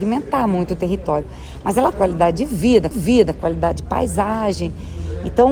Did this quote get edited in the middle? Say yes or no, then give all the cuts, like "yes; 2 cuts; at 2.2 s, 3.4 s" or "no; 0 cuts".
yes; 2 cuts; at 1.9 s, 2.9 s